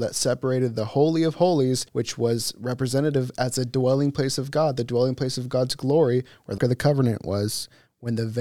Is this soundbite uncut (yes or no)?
no